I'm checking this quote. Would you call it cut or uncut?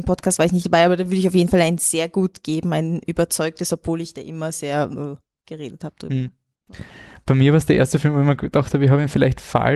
uncut